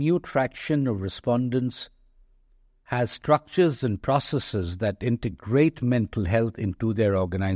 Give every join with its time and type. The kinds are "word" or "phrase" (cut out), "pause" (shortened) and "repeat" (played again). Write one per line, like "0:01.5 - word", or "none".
none